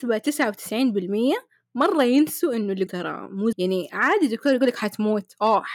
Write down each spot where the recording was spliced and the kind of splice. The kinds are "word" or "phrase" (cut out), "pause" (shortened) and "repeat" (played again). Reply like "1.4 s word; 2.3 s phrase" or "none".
2.9 s word; 3.5 s word